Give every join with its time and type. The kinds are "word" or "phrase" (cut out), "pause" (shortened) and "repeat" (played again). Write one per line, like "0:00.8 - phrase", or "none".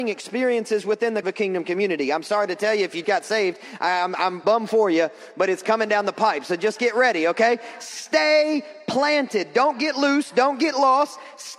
0:01.2 - phrase
0:03.0 - word
0:04.4 - word